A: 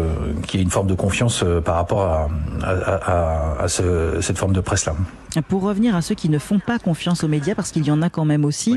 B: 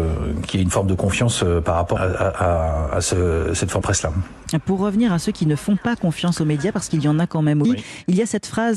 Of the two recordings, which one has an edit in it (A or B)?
B